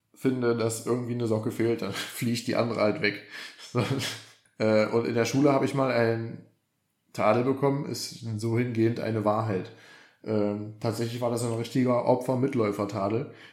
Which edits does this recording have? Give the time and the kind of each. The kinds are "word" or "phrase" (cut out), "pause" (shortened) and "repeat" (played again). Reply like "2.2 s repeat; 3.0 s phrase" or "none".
none